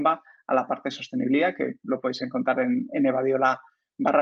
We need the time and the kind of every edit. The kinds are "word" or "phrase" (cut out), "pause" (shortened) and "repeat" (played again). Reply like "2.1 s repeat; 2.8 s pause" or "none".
none